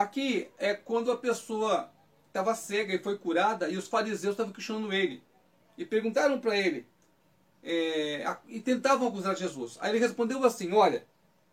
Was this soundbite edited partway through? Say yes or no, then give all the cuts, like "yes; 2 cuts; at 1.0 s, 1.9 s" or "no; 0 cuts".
no; 0 cuts